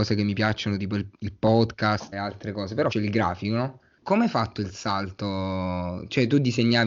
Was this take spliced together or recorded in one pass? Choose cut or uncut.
cut